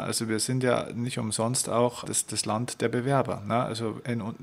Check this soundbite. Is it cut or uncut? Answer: cut